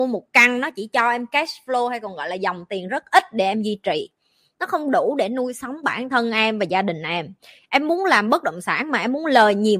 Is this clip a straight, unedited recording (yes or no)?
yes